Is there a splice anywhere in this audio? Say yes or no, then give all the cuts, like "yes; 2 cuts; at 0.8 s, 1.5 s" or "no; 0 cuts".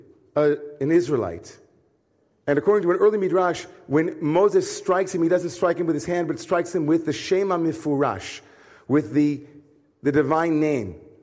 no; 0 cuts